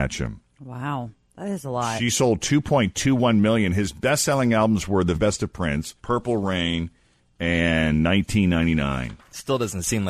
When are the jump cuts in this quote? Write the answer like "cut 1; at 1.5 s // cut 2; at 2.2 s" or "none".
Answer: cut 1; at 5.1 s // cut 2; at 6.0 s

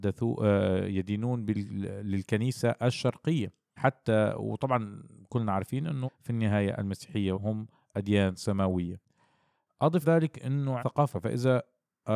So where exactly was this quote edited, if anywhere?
cut 1; at 3.8 s // cut 2; at 6.0 s // cut 3; at 7.3 s // cut 4; at 10.0 s // cut 5; at 10.8 s // cut 6; at 11.1 s

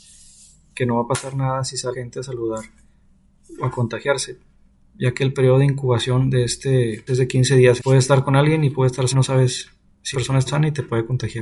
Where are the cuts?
cut 1; at 1.9 s // cut 2; at 7.1 s // cut 3; at 7.8 s // cut 4; at 9.1 s // cut 5; at 10.1 s // cut 6; at 10.5 s

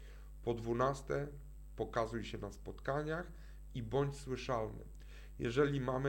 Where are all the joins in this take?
none

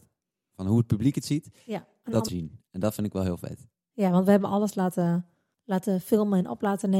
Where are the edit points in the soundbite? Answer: cut 1; at 2.3 s // cut 2; at 5.5 s

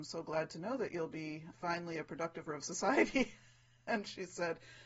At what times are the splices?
cut 1; at 1.5 s // cut 2; at 2.5 s

